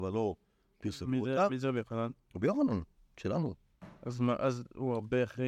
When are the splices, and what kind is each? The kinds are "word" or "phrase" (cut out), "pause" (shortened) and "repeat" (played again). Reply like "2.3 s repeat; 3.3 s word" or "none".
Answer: none